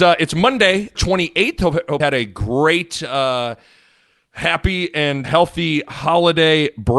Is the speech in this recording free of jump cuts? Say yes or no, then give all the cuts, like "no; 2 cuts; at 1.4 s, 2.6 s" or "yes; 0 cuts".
no; 3 cuts; at 0.9 s, 2.0 s, 5.2 s